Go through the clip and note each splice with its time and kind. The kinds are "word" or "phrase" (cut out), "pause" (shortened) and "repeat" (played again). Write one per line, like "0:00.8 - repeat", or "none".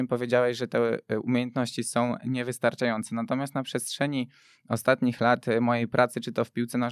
none